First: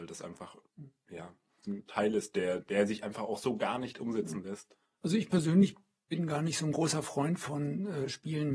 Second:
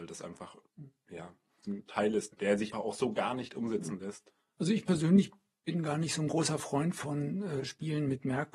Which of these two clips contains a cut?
second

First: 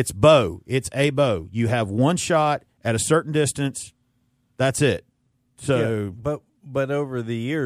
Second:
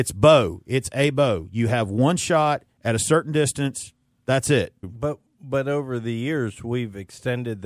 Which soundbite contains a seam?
second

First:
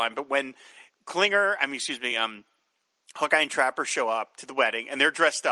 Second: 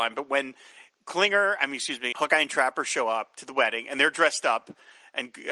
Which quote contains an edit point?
second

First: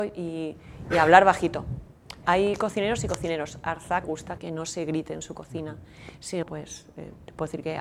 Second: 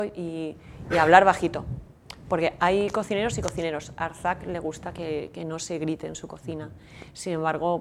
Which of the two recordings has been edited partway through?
first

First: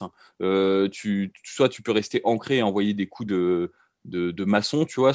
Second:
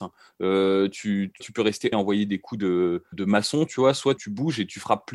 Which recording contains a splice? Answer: second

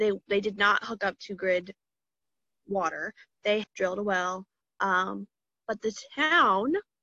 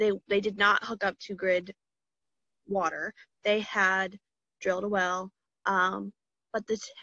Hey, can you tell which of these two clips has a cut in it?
first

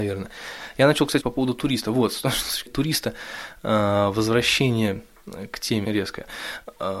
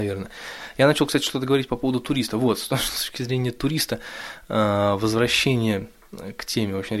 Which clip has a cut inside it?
first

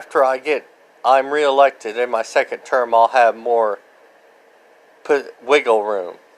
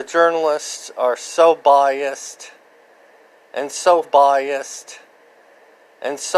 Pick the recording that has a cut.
second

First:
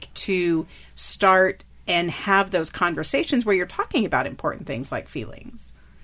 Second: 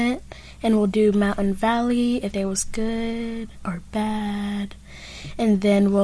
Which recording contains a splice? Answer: second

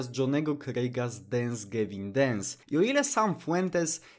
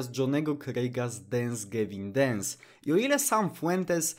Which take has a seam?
first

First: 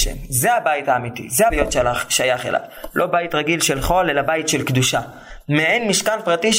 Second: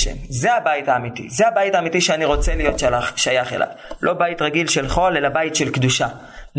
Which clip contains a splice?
first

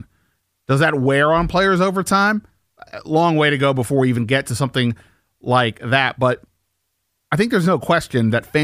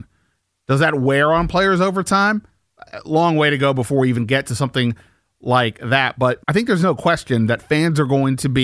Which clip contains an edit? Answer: second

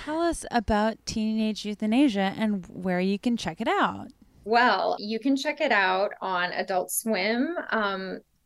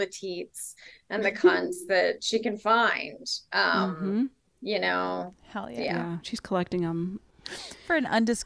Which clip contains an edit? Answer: first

